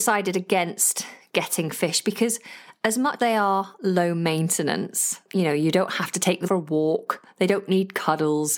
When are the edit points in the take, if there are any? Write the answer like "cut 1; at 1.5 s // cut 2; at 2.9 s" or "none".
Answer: cut 1; at 3.2 s // cut 2; at 5.2 s // cut 3; at 6.4 s